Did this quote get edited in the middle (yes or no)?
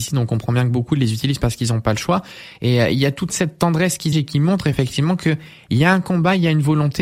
yes